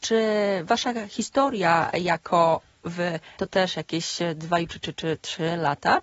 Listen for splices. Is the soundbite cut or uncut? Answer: cut